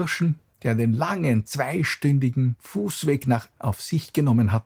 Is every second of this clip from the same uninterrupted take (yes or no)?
no